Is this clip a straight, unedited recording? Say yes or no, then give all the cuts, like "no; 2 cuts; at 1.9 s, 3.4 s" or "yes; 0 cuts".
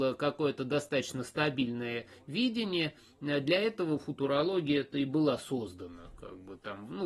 yes; 0 cuts